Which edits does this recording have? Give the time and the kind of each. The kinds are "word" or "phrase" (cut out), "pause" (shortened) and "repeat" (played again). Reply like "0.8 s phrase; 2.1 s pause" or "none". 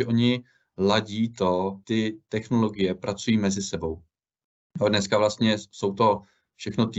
1.8 s word